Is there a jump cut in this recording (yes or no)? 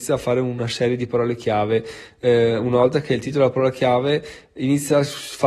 no